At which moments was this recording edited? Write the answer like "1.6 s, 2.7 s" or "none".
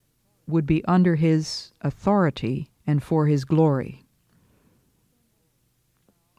2.8 s